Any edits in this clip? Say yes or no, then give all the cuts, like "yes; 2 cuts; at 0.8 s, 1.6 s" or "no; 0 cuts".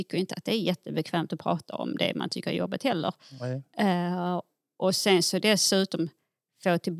no; 0 cuts